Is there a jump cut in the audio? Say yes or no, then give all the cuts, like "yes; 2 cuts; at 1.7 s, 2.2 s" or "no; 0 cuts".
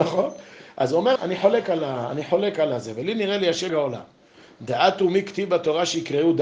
yes; 2 cuts; at 1.2 s, 3.7 s